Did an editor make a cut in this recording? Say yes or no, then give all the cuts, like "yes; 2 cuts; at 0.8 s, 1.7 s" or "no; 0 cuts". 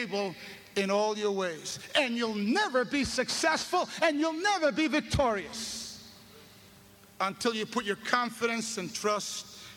no; 0 cuts